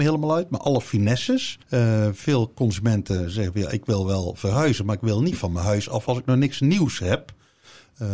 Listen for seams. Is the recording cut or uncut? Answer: cut